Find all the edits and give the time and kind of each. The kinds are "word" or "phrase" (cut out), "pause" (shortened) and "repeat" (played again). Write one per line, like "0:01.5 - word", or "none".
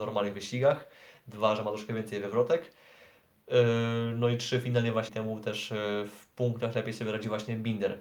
0:05.1 - word